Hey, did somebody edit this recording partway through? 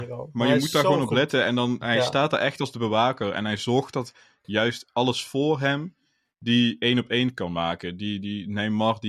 no; 0 cuts

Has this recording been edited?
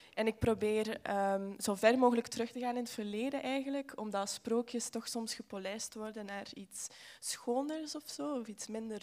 no; 0 cuts

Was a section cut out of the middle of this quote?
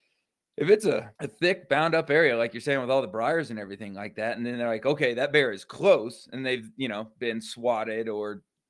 yes; 1 cut; at 1.2 s

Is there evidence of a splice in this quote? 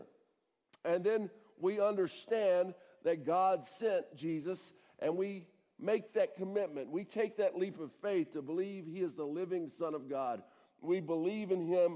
no; 0 cuts

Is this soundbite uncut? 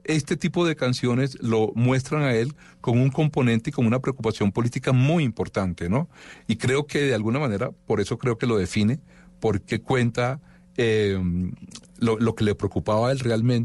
yes; 0 cuts

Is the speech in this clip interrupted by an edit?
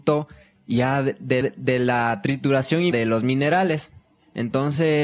yes; 2 cuts; at 1.4 s, 2.9 s

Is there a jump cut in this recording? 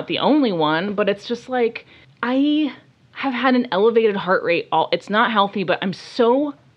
yes; 1 cut; at 2.0 s

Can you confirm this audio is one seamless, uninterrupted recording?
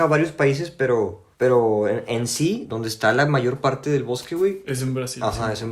no; 2 cuts; at 1.3 s, 2.7 s

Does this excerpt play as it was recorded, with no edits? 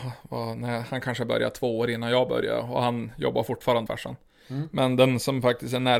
no; 1 cut; at 3.9 s

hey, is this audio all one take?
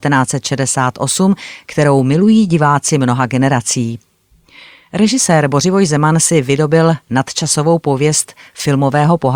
yes; 0 cuts

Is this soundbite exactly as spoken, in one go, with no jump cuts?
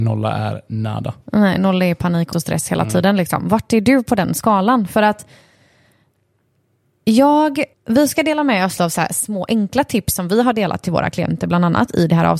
no; 3 cuts; at 2.3 s, 7.7 s, 8.8 s

